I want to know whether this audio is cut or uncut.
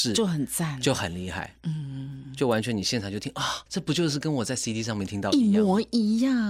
cut